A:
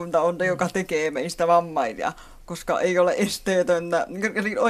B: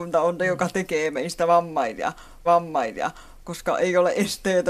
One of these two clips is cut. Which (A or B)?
B